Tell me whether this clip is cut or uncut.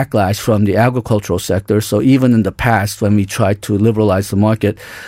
uncut